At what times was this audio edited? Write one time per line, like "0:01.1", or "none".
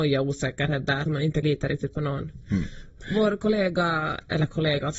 0:01.1
0:01.4